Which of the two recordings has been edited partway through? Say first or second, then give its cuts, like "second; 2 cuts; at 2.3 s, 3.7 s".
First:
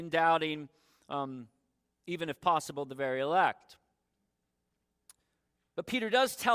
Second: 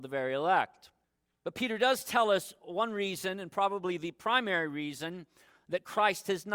second; 1 cut; at 1.0 s